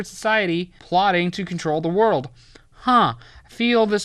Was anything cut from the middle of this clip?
no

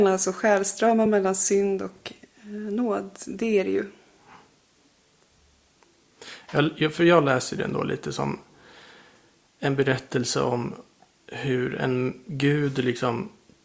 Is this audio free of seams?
yes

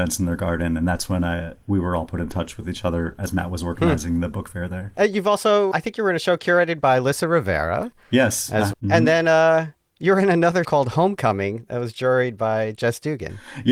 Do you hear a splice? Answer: yes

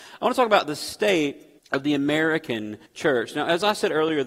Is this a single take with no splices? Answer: no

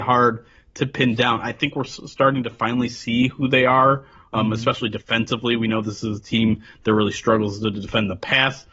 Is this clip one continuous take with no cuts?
yes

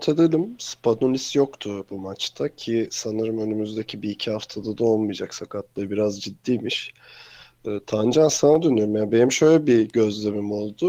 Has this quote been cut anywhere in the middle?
no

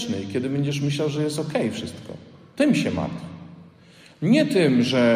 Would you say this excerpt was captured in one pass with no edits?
yes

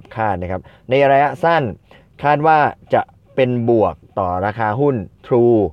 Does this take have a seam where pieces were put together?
no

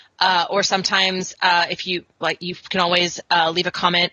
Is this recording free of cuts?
yes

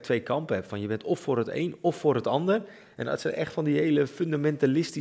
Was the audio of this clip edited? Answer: no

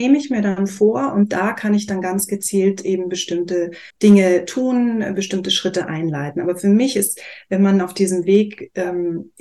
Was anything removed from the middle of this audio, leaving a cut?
yes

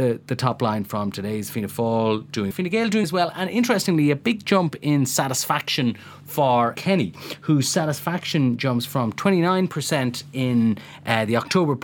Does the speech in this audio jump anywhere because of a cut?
yes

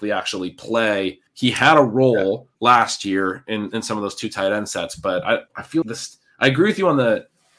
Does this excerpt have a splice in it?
yes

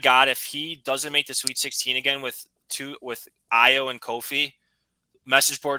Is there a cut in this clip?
no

